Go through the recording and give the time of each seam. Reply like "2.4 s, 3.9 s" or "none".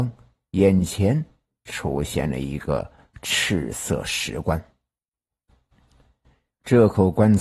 none